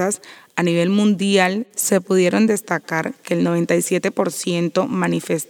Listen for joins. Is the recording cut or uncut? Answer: uncut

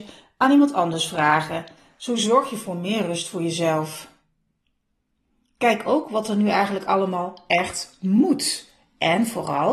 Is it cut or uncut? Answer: uncut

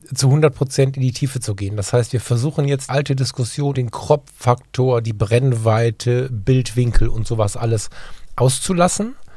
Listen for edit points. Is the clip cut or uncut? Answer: cut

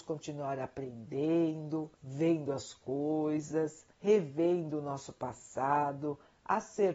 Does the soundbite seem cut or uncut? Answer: cut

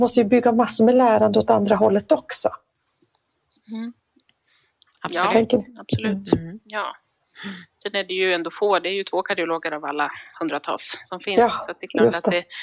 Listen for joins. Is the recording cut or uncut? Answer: uncut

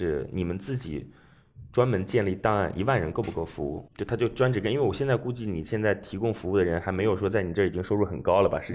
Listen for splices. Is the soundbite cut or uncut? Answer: cut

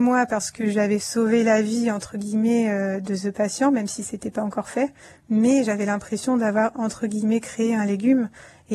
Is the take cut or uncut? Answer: uncut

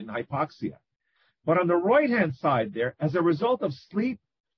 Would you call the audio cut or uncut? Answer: uncut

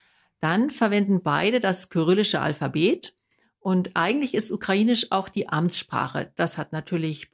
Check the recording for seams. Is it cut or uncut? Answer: uncut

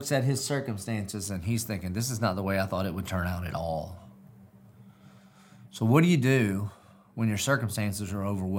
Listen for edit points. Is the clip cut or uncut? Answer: uncut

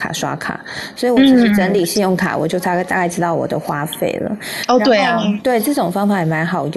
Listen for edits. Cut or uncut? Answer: uncut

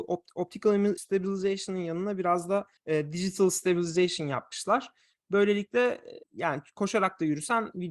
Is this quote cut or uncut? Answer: cut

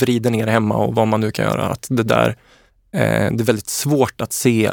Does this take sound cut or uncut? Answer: uncut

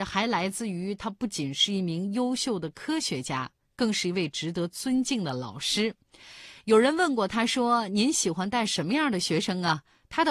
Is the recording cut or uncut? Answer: uncut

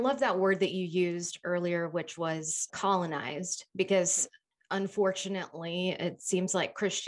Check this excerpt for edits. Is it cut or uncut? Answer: cut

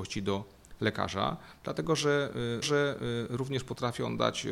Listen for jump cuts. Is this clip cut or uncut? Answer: cut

